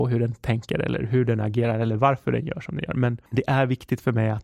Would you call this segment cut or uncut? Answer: cut